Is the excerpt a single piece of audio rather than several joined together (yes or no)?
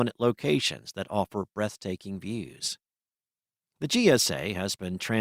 yes